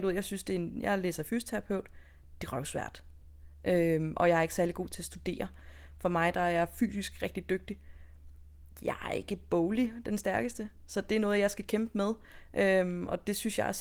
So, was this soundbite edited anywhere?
no; 0 cuts

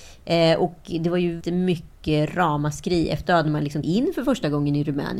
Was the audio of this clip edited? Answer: yes; 3 cuts; at 1.4 s, 3.2 s, 3.8 s

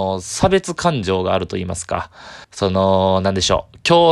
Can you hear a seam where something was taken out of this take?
yes; 1 cut; at 2.4 s

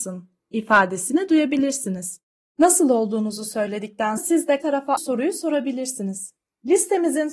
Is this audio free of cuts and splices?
no; 3 cuts; at 4.2 s, 4.6 s, 5.0 s

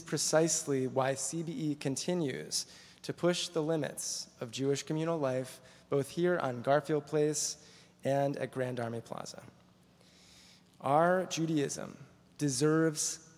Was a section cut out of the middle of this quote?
no; 0 cuts

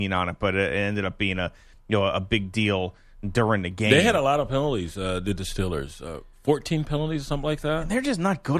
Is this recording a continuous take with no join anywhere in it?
yes; 0 cuts

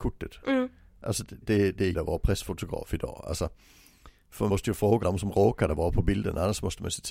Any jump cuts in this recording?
yes; 4 cuts; at 1.4 s, 1.9 s, 4.5 s, 5.0 s

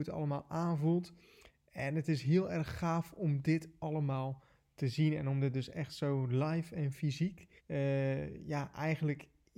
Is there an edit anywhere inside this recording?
yes; 1 cut; at 7.6 s

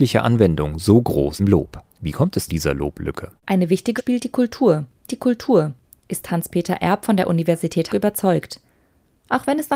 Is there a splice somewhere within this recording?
yes; 7 cuts; at 1.4 s, 1.9 s, 2.5 s, 3.4 s, 4.0 s, 5.1 s, 7.9 s

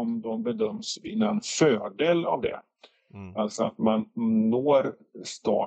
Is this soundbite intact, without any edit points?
yes; 0 cuts

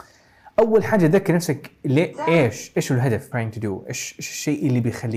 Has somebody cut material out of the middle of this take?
yes; 1 cut; at 3.3 s

